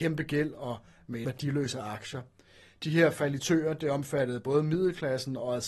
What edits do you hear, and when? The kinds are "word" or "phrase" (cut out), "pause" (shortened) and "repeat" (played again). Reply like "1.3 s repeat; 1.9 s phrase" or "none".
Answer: 1.2 s word